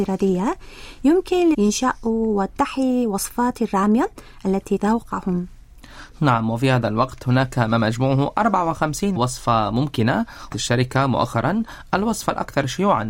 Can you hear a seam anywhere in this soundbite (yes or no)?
yes